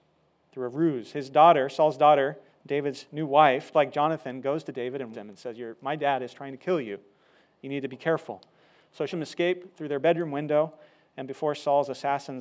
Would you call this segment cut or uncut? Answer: cut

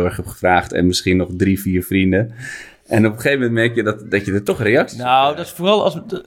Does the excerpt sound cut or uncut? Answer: uncut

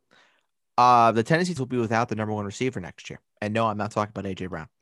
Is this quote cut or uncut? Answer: cut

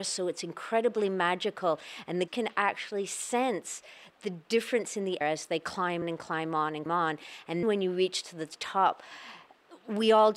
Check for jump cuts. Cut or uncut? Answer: cut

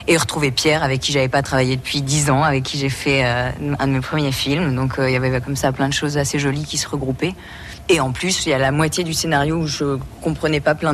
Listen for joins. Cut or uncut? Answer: uncut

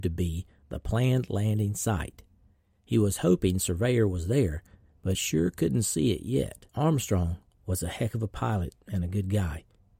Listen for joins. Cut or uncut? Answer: cut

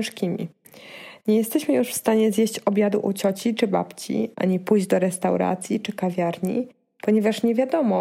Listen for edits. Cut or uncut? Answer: uncut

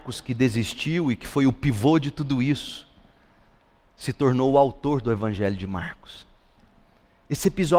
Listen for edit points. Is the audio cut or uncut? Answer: uncut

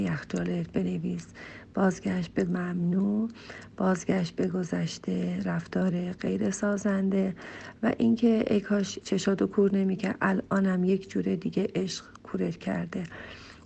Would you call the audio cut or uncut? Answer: cut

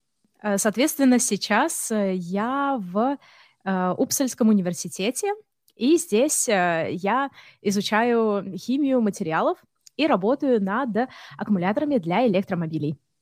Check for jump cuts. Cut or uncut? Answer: uncut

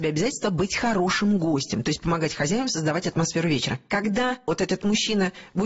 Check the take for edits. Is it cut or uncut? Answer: uncut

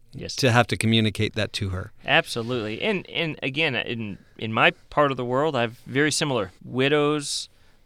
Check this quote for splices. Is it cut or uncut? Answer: cut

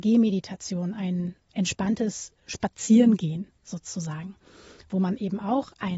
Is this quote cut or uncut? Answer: uncut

